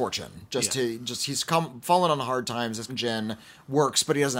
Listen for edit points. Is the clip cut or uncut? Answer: cut